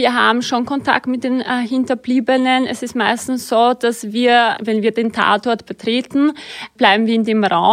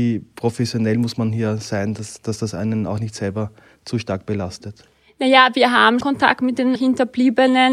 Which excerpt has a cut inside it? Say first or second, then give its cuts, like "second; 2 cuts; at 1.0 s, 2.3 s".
second; 2 cuts; at 6.0 s, 6.8 s